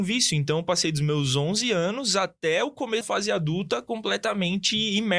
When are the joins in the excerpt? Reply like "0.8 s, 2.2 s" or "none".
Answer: 3.0 s